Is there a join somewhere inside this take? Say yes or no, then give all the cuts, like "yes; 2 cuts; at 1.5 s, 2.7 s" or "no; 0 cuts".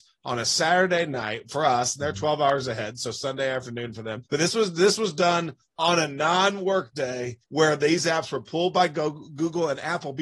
yes; 2 cuts; at 4.3 s, 7.4 s